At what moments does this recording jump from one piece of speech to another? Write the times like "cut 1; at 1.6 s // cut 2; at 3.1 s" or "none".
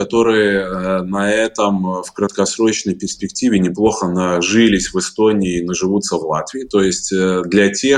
none